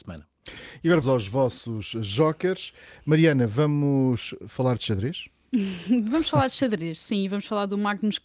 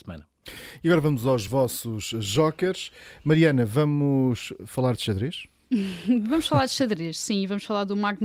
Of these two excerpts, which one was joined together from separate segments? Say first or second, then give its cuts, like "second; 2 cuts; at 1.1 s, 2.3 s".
first; 1 cut; at 1.0 s